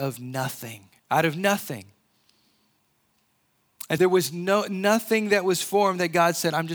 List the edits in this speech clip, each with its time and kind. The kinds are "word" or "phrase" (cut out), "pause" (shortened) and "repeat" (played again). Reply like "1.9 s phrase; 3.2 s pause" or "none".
1.0 s pause; 4.0 s word